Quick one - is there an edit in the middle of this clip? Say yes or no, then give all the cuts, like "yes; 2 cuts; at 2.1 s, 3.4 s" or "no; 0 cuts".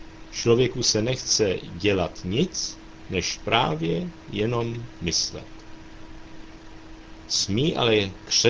no; 0 cuts